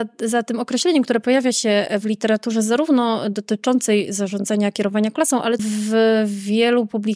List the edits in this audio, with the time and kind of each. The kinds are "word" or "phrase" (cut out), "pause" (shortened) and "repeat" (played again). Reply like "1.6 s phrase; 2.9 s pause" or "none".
5.6 s word

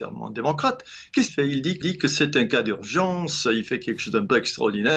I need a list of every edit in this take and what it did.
1.3 s word; 1.8 s repeat

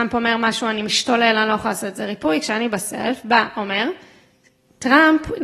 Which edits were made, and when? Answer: none

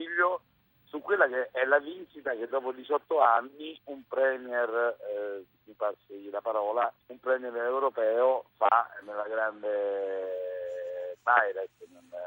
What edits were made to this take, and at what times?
5.5 s pause; 7.0 s pause; 9.0 s word

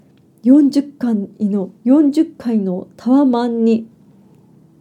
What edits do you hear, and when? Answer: 1.7 s pause

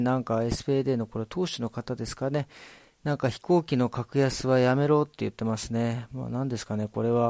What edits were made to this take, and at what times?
none

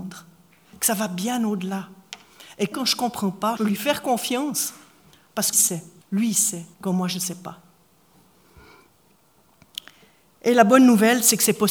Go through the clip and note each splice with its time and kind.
2.7 s word; 3.6 s word; 5.5 s word; 6.0 s pause; 6.7 s pause

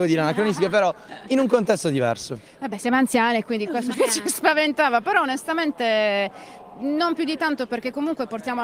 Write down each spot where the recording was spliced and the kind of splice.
3.9 s word

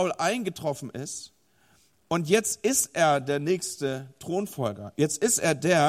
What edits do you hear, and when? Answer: none

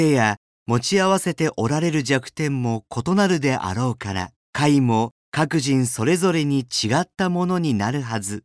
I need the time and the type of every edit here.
4.4 s pause; 5.2 s pause

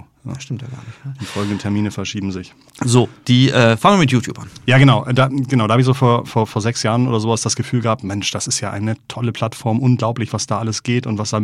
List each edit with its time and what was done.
none

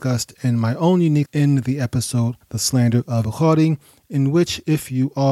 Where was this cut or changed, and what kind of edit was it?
1.3 s word; 2.4 s word; 3.2 s word

